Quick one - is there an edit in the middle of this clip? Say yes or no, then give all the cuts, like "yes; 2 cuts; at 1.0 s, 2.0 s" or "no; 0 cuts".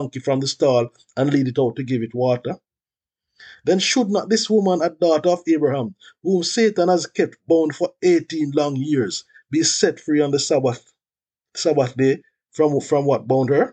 no; 0 cuts